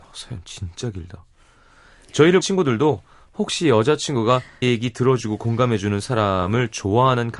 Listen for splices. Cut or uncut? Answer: cut